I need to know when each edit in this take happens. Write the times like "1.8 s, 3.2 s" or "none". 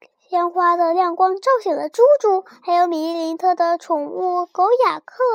2.5 s